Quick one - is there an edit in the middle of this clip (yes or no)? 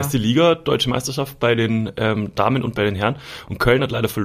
no